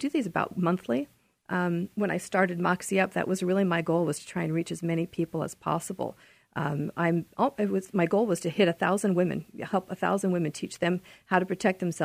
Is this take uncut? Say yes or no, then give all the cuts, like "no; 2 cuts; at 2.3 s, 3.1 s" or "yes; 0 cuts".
yes; 0 cuts